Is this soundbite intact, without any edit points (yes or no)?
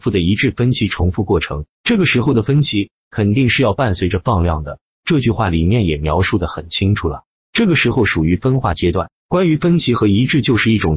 no